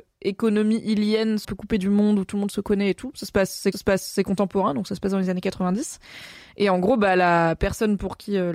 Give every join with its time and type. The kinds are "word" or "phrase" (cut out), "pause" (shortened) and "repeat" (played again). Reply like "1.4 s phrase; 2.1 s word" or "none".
1.4 s phrase; 3.7 s repeat